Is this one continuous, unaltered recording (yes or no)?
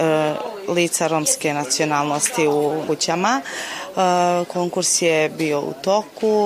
no